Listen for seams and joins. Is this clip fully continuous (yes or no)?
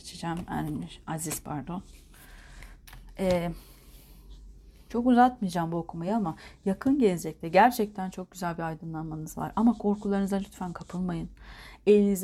yes